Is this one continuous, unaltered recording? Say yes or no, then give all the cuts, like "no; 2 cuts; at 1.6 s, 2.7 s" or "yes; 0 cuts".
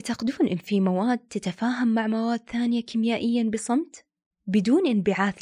yes; 0 cuts